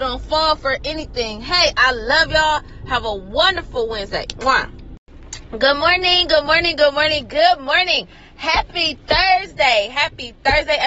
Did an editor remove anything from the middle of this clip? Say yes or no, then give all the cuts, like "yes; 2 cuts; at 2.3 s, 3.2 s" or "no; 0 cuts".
no; 0 cuts